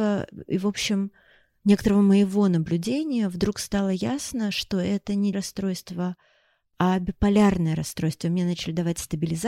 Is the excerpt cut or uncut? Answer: cut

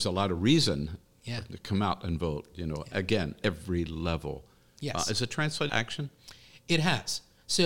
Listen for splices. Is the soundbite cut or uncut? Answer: cut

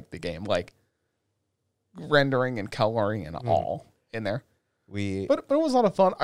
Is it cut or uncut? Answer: uncut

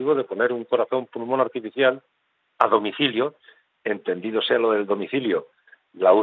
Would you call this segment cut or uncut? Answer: uncut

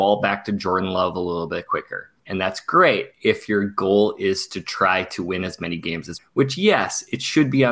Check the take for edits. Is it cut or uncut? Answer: cut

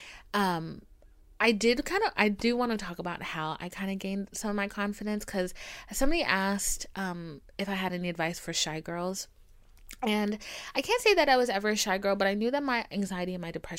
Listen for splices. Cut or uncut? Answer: uncut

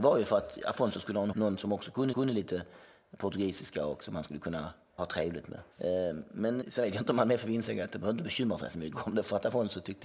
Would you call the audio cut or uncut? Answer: cut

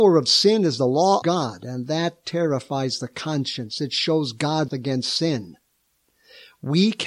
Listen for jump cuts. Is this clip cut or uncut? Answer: cut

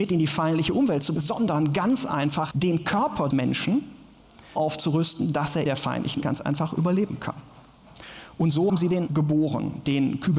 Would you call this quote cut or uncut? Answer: cut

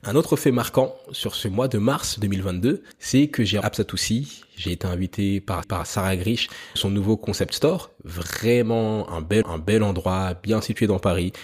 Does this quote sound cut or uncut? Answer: cut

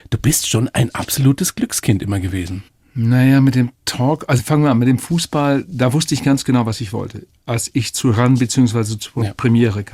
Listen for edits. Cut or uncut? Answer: uncut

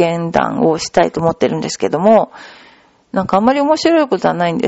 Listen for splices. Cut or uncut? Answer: uncut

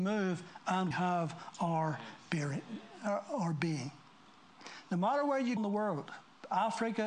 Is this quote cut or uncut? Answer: cut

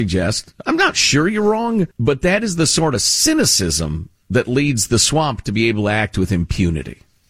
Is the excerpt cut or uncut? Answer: cut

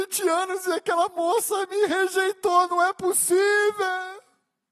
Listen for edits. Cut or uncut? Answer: uncut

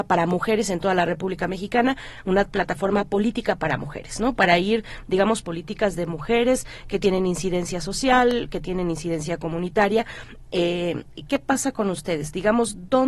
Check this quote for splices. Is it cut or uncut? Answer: cut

